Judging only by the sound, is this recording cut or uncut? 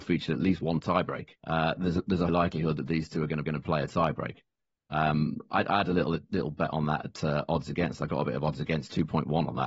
cut